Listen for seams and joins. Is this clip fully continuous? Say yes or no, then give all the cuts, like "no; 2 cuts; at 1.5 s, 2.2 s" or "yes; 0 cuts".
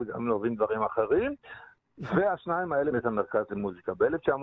no; 1 cut; at 2.9 s